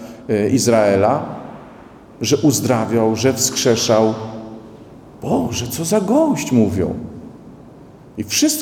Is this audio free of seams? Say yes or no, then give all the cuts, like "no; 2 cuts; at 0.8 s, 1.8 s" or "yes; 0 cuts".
yes; 0 cuts